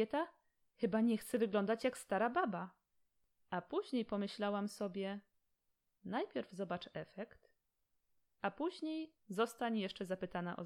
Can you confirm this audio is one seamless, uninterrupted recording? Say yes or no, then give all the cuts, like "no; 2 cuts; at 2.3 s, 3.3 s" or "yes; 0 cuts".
yes; 0 cuts